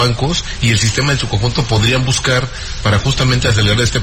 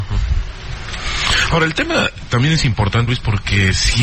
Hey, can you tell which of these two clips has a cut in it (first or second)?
second